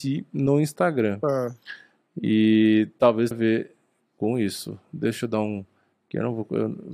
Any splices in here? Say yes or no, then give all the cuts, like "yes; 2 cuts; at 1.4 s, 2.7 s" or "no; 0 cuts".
yes; 1 cut; at 3.3 s